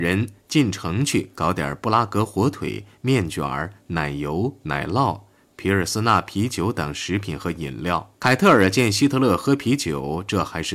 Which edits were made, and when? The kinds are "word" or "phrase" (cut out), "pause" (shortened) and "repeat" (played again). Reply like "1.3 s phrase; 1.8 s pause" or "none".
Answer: 8.1 s pause